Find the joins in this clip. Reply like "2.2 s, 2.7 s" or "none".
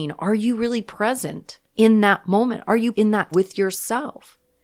1.7 s, 2.9 s, 3.3 s